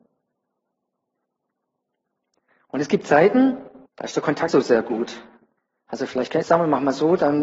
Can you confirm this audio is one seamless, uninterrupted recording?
no; 4 cuts; at 3.9 s, 4.5 s, 5.6 s, 6.4 s

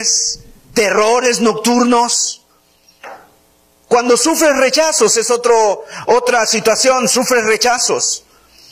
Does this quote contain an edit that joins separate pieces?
no; 0 cuts

